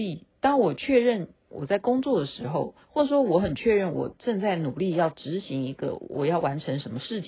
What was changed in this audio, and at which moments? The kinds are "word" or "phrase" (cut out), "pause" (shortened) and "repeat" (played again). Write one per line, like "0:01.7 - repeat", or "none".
0:02.8 - pause